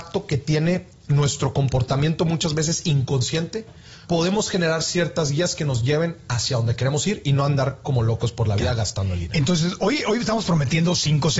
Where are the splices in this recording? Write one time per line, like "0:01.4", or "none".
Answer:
0:04.0